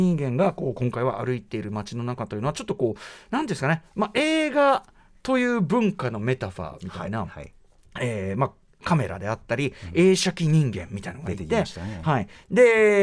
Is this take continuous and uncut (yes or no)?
yes